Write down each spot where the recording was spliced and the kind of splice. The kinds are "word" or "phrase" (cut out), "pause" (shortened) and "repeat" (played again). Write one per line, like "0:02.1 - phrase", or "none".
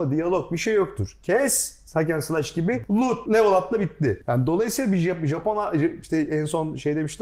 0:03.3 - word